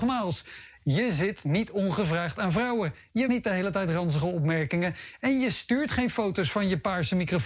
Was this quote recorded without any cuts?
no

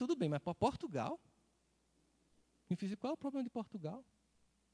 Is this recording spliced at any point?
no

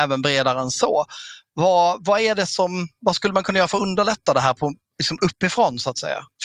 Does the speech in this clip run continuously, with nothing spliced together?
yes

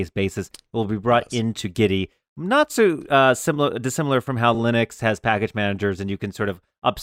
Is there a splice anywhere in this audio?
no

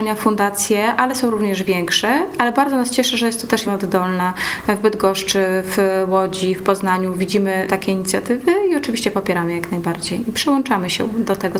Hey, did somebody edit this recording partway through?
yes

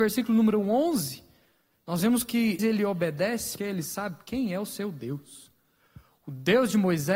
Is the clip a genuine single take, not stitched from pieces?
no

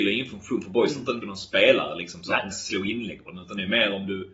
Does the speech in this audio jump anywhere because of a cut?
yes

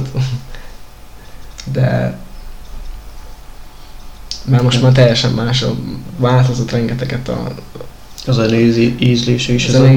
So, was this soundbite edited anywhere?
no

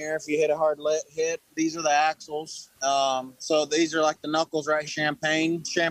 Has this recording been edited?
yes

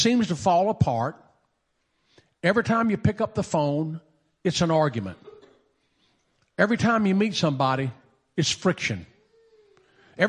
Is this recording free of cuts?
yes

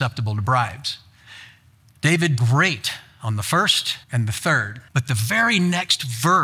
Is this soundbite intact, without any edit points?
no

